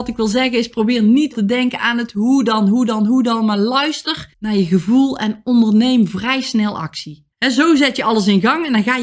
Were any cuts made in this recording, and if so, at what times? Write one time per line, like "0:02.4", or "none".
0:01.3
0:04.3
0:07.3